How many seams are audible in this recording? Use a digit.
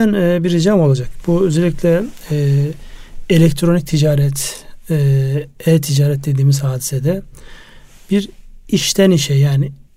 0